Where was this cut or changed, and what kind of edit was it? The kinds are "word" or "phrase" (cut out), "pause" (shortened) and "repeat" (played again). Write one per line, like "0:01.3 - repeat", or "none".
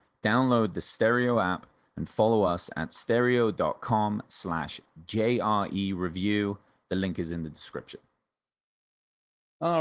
none